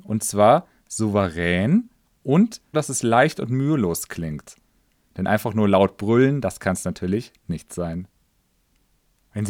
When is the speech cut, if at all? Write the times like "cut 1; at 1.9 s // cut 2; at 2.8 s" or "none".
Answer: cut 1; at 2.7 s